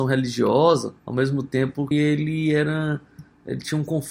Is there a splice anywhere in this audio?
yes; 2 cuts; at 1.0 s, 1.9 s

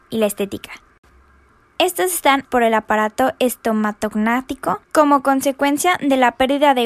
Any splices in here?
yes; 2 cuts; at 2.4 s, 4.8 s

